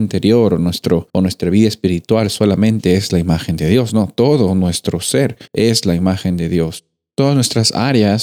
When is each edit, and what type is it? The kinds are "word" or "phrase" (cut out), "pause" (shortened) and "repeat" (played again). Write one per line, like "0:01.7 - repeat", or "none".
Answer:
0:01.1 - pause
0:05.5 - pause

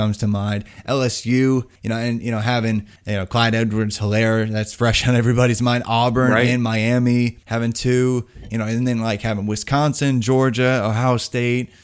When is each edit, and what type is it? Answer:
0:01.8 - pause
0:03.0 - pause
0:07.4 - pause

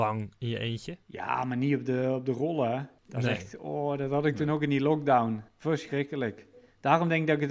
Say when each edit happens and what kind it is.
0:01.0 - pause
0:03.0 - pause
0:05.5 - pause

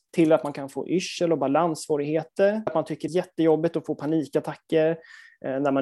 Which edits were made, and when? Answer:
0:02.7 - word
0:03.1 - word

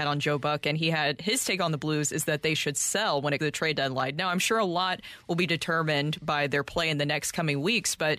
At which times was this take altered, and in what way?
0:03.4 - word

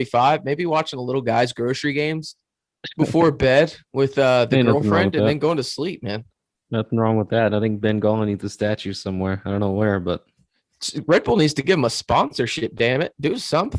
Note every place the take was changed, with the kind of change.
0:03.8 - pause
0:06.5 - pause

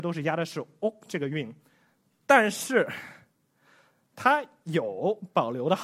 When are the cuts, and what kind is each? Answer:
none

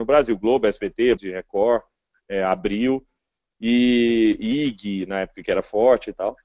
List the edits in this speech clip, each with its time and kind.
0:01.2 - word

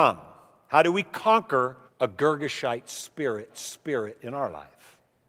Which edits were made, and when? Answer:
0:01.9 - pause
0:03.5 - repeat

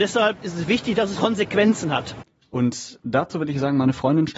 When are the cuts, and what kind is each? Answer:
none

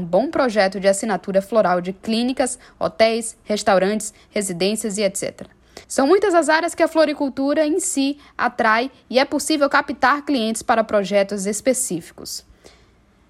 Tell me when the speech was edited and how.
0:05.8 - pause

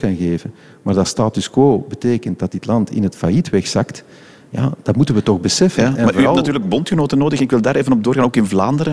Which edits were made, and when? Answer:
none

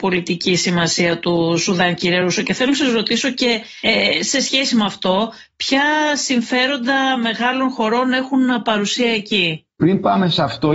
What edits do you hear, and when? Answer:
none

